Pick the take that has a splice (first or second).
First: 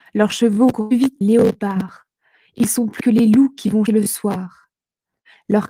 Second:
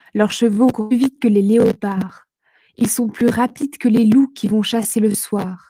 first